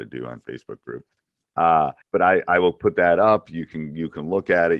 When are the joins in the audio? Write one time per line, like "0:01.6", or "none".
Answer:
0:02.0